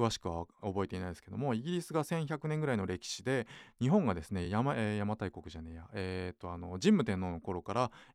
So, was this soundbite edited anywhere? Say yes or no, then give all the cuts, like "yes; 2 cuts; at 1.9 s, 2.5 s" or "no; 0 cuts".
no; 0 cuts